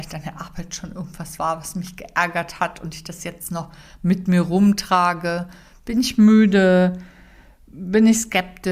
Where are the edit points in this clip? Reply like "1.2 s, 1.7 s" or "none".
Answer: none